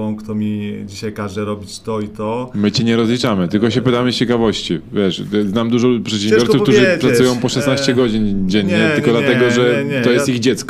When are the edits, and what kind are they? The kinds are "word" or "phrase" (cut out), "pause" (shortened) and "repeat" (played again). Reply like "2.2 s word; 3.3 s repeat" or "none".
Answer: none

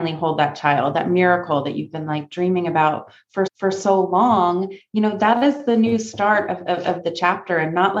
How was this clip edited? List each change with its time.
3.5 s repeat

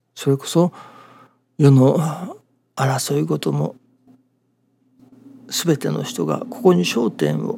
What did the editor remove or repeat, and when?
none

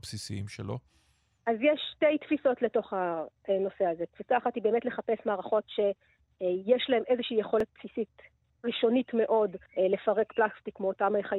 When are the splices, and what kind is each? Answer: 9.7 s pause

